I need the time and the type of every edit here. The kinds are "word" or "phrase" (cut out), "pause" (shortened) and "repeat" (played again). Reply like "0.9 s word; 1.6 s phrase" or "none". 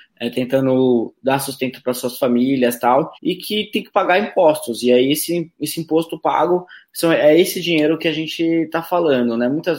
3.1 s pause